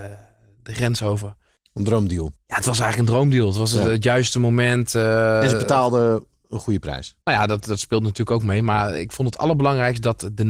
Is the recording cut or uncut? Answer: uncut